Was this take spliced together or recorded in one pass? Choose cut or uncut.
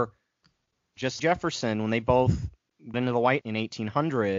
cut